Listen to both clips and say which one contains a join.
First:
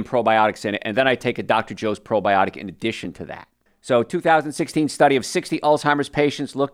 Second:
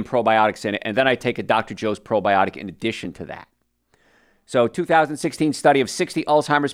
first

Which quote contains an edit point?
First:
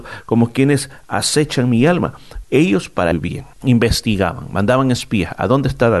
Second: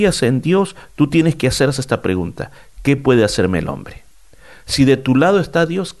first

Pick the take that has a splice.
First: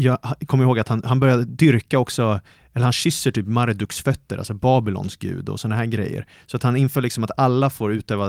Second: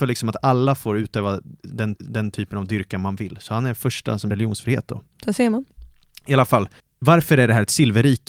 second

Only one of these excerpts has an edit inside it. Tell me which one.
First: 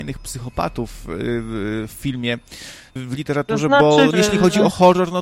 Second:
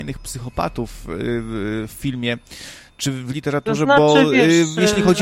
first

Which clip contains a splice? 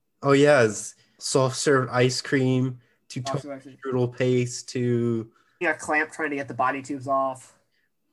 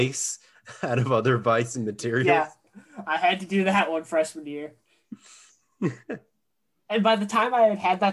first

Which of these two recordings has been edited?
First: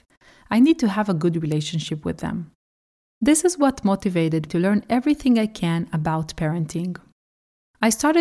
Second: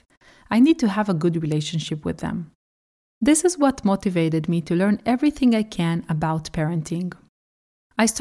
first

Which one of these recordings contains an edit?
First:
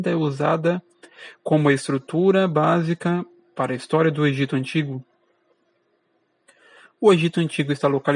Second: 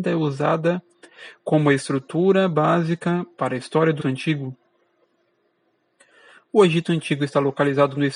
second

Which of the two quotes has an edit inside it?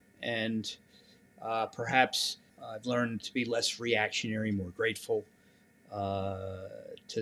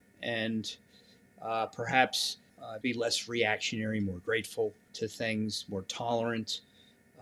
second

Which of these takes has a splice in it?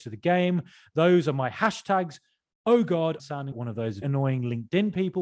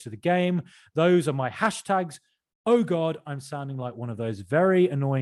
first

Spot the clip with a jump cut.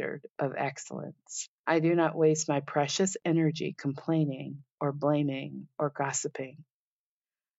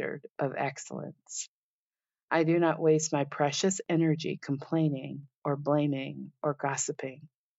first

